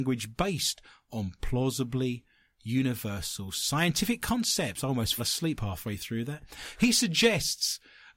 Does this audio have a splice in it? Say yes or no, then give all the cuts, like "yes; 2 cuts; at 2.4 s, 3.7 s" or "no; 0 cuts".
yes; 1 cut; at 5.2 s